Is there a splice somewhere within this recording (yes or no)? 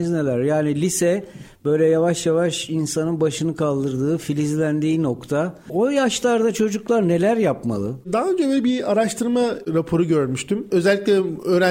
yes